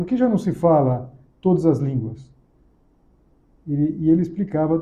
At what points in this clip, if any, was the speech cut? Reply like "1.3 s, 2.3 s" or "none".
none